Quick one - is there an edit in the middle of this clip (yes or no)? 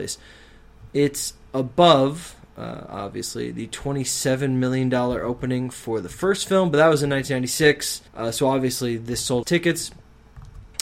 yes